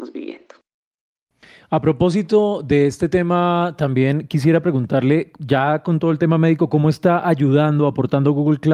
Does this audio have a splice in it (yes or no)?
no